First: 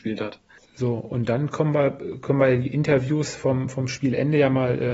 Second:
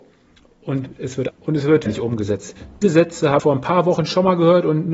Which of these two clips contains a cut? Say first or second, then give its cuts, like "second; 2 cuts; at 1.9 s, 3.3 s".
second; 4 cuts; at 1.3 s, 1.9 s, 2.8 s, 3.4 s